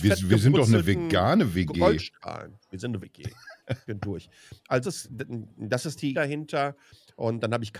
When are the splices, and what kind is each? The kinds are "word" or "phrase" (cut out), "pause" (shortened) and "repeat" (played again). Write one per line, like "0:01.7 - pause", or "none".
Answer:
0:03.0 - word
0:03.9 - word
0:04.8 - word
0:06.1 - word